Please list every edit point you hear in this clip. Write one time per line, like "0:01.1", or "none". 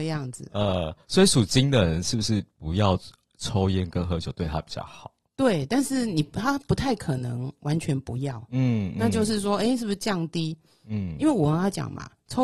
none